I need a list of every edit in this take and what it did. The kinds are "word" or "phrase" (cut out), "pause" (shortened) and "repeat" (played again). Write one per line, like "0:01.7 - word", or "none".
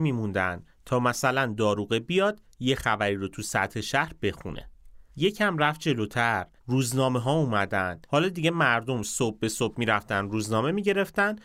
0:05.1 - pause
0:06.6 - pause
0:08.0 - pause